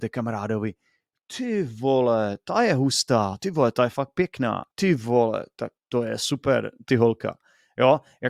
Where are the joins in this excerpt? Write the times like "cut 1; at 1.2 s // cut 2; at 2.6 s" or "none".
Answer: cut 1; at 4.7 s // cut 2; at 5.8 s // cut 3; at 6.9 s